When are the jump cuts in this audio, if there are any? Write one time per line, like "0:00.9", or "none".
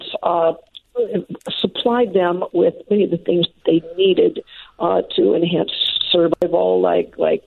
none